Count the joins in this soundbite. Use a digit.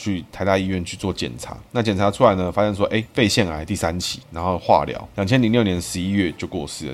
0